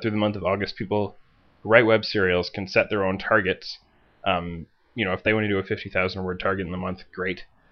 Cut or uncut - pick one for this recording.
uncut